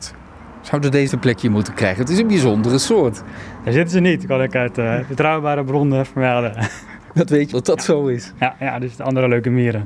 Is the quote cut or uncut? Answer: cut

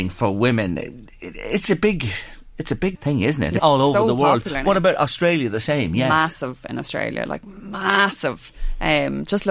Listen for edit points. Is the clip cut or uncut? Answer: cut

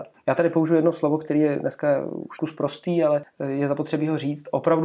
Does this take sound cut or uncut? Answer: cut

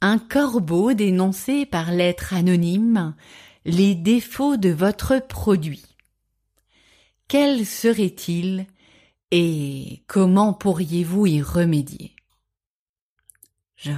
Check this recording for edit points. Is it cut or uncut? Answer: uncut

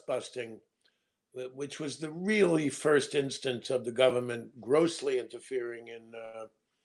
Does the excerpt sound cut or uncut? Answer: uncut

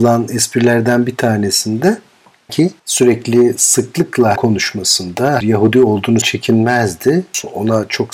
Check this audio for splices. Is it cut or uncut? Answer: cut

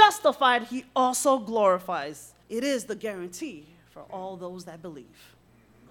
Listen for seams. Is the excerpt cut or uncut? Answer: cut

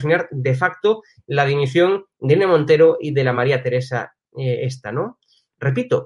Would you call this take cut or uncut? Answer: uncut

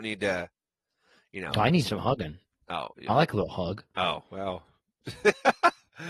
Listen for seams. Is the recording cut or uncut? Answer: uncut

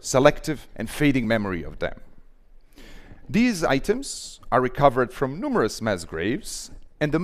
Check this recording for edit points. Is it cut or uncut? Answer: uncut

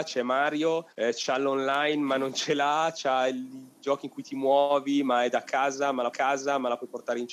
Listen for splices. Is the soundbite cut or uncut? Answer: cut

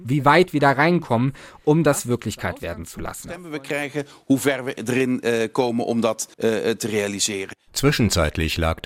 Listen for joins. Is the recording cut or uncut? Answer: cut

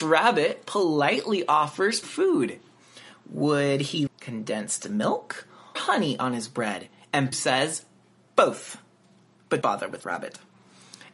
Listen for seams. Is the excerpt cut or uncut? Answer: cut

